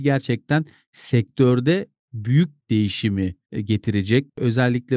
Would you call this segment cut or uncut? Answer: cut